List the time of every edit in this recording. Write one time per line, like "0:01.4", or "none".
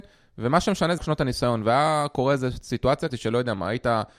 0:01.0
0:03.1

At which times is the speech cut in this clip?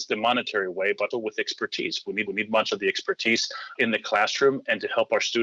0:01.1
0:02.3
0:03.8

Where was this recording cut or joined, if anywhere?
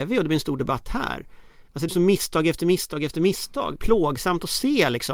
0:01.9
0:03.8

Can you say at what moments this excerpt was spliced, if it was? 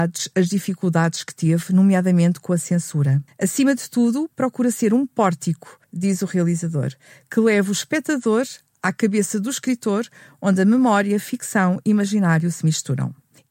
0:03.3
0:05.8

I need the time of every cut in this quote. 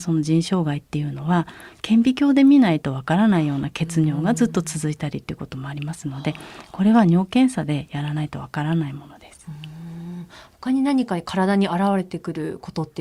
none

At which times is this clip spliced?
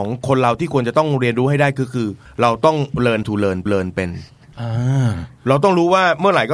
0:02.3
0:03.2
0:03.7

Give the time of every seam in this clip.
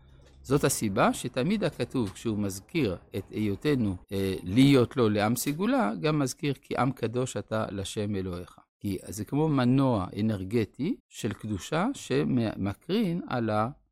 0:04.0
0:08.7
0:11.0

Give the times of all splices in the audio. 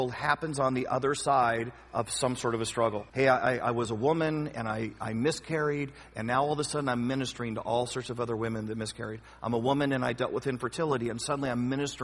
0:03.1

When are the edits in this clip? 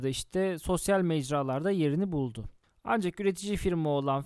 none

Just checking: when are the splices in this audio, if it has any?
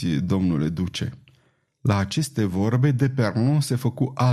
none

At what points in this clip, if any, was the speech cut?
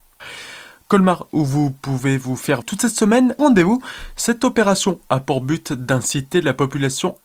0:02.6
0:03.4

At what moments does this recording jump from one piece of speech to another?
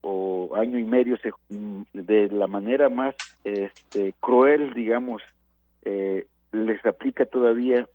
0:01.3
0:03.3

